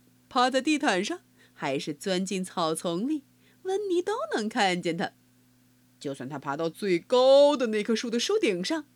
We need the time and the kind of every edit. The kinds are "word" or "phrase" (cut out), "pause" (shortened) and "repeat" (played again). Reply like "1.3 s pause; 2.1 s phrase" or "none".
none

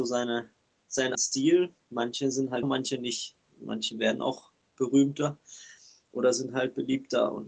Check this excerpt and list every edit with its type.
1.1 s word; 2.6 s word

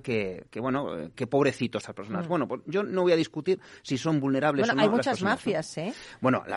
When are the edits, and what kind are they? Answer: 1.1 s word; 1.8 s phrase

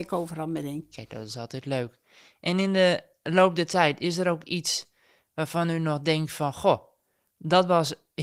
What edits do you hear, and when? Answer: none

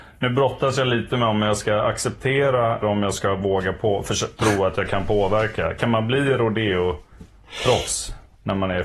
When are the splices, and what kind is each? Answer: 2.8 s word

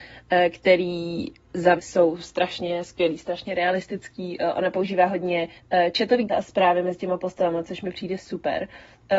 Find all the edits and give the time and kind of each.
1.8 s word; 5.6 s pause; 6.3 s word

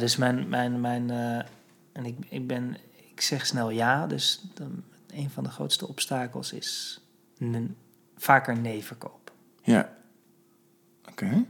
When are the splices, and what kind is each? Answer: none

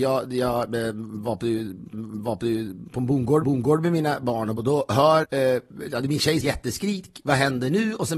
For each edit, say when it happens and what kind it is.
1.9 s repeat; 3.4 s repeat; 4.6 s phrase; 5.2 s word; 6.4 s phrase

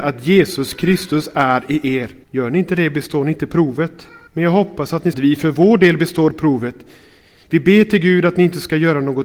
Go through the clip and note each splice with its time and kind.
2.2 s pause; 4.3 s pause; 5.1 s phrase

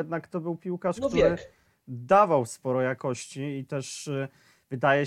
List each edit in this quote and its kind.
2.5 s word

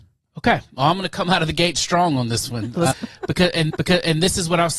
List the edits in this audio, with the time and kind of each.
2.9 s word; 3.7 s repeat

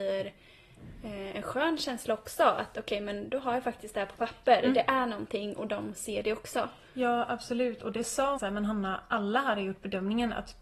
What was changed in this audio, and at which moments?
8.4 s phrase

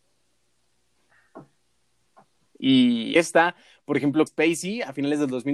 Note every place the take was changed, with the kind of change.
3.2 s word; 4.3 s word

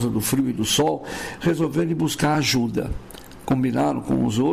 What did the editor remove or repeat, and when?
none

